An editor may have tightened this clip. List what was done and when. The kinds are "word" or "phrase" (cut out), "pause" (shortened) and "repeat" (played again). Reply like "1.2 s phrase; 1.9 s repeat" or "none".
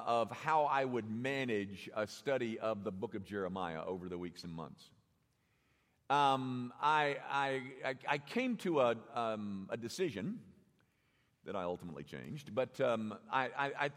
none